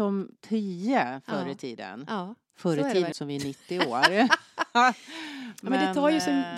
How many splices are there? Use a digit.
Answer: 1